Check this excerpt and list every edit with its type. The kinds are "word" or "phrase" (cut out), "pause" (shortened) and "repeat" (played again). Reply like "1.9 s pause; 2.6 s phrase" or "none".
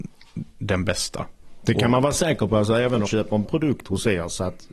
3.1 s word; 3.4 s word